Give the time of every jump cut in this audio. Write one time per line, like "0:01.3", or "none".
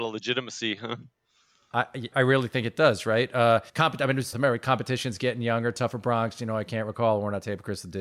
0:02.1
0:03.7
0:04.3